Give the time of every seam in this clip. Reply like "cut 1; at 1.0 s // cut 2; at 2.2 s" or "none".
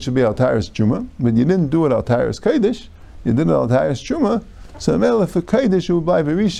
none